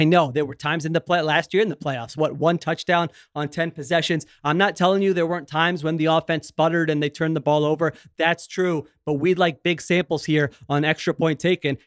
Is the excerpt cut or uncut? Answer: uncut